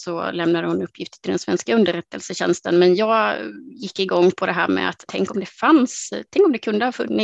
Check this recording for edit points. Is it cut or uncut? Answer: cut